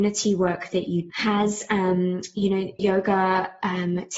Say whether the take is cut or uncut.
cut